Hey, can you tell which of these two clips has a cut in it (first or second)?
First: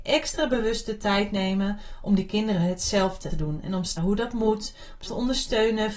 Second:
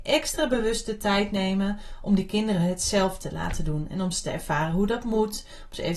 first